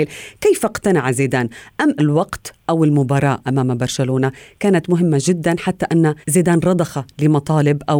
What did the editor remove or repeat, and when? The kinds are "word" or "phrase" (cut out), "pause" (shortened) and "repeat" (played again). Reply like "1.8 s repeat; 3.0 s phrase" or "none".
2.0 s word; 6.2 s pause